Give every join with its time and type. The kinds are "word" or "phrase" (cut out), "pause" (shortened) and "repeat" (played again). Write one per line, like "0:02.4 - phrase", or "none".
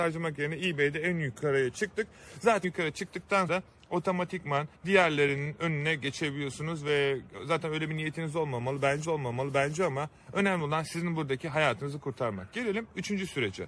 0:02.6 - word
0:03.5 - word
0:04.7 - pause
0:09.0 - repeat